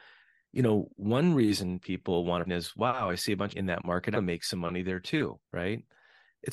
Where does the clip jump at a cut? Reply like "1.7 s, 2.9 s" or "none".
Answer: 2.5 s, 3.5 s, 4.1 s, 5.4 s